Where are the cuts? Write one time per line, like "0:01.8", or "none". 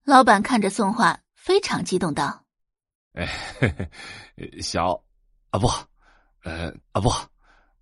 0:02.5
0:06.8